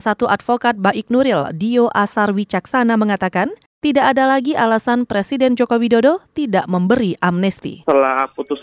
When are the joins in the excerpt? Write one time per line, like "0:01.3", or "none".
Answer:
none